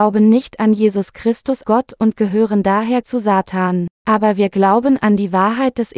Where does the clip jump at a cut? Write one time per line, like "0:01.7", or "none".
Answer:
0:01.6
0:03.0
0:03.9